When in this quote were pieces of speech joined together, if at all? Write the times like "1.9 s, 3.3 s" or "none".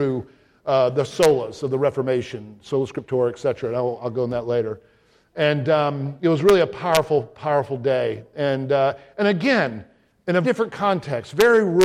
10.4 s